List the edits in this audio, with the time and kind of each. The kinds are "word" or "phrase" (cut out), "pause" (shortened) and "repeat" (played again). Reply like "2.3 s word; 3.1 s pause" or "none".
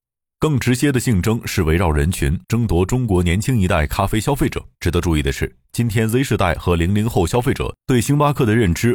2.4 s pause; 4.7 s pause